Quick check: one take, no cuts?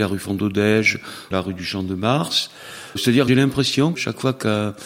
no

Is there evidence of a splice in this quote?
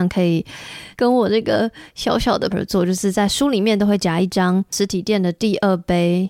yes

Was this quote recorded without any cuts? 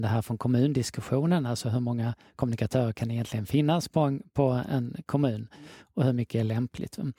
yes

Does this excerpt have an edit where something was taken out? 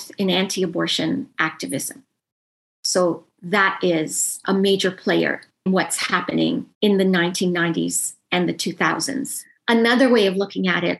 yes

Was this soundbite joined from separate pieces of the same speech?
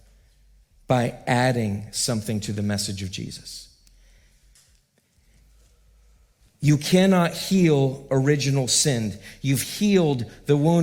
no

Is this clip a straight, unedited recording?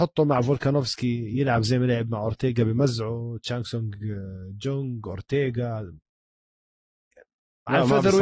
yes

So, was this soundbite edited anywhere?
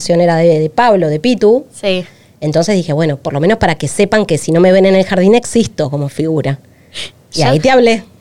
no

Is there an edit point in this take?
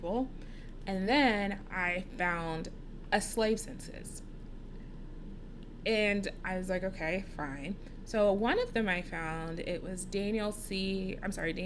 no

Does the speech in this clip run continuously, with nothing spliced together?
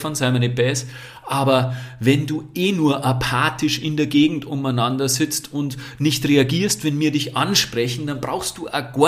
yes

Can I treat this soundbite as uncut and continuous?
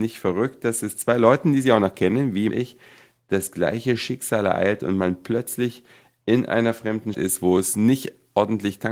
no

